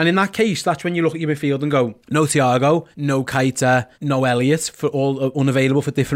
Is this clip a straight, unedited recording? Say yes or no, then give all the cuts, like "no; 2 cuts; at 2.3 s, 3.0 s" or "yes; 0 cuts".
no; 3 cuts; at 2.0 s, 2.9 s, 3.9 s